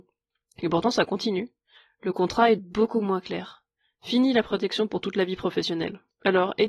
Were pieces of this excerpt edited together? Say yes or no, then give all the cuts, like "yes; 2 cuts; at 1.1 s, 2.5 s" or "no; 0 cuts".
yes; 1 cut; at 2.6 s